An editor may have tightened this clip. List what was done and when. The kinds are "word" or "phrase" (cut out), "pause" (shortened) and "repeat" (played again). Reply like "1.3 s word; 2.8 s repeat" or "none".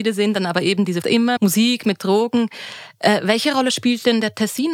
1.0 s word; 1.4 s word

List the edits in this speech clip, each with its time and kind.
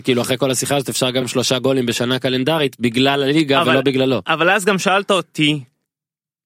1.2 s phrase

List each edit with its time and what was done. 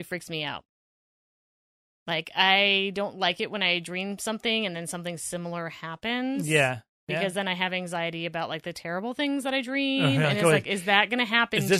none

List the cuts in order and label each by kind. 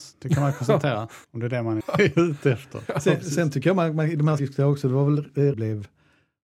1.2 s pause; 1.8 s word; 4.4 s phrase; 5.5 s phrase

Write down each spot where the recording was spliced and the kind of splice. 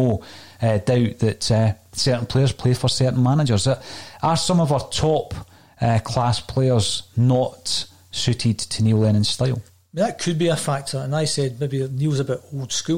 9.7 s pause

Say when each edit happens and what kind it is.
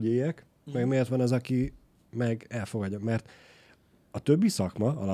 none

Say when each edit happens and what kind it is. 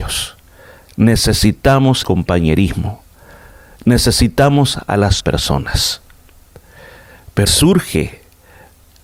2.0 s word; 5.2 s word; 7.5 s word

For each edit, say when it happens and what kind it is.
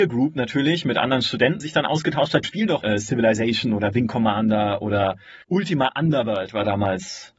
1.6 s phrase; 2.4 s phrase; 2.8 s word; 5.4 s pause

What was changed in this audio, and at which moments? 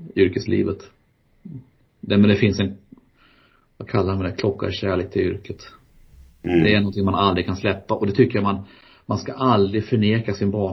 none

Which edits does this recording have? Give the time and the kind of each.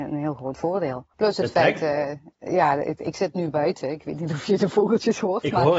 1.1 s pause

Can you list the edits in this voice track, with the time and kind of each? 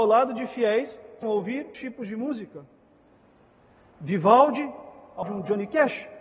1.2 s word; 1.7 s word; 5.2 s word

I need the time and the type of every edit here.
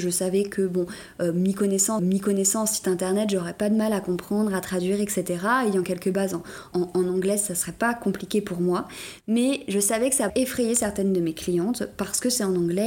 2.0 s repeat; 6.7 s word; 10.3 s word

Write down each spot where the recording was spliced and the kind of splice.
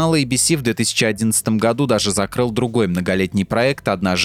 none

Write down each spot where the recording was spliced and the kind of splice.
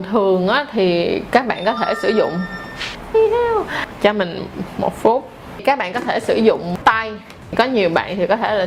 3.1 s word; 6.8 s word

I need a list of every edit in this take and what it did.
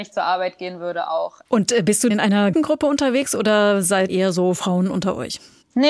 2.1 s word; 2.5 s word; 4.1 s word

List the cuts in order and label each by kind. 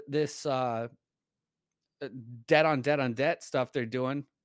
none

